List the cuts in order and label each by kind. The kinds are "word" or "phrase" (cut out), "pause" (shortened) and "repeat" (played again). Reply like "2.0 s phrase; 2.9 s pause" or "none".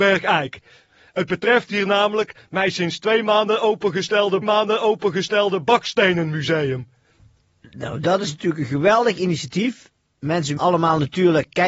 4.4 s repeat; 10.6 s word